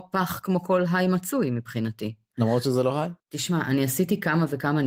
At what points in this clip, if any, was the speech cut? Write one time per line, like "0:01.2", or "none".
0:03.2